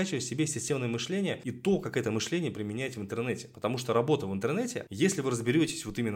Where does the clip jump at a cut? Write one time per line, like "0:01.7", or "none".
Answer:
none